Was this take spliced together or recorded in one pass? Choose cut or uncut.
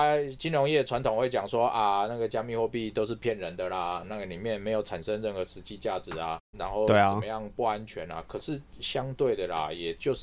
uncut